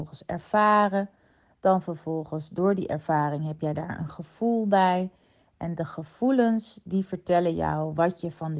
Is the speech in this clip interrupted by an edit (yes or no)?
no